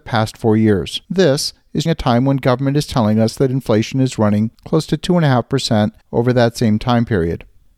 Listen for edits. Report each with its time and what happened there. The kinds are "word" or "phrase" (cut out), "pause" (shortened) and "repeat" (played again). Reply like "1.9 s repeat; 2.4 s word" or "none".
1.0 s pause; 1.9 s word; 4.5 s pause; 6.0 s pause